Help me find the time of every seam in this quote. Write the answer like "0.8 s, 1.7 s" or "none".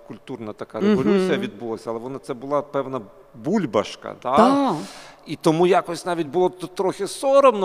none

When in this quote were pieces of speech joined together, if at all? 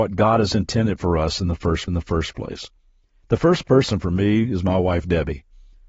1.9 s

